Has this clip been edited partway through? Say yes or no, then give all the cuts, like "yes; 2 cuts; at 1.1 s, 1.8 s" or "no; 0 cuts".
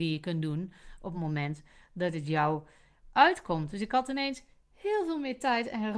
no; 0 cuts